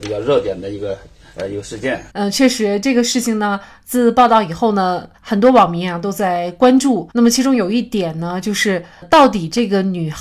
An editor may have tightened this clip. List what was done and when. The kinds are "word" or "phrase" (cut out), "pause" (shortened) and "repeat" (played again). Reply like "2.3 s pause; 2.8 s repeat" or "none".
2.1 s pause; 5.2 s pause; 7.1 s pause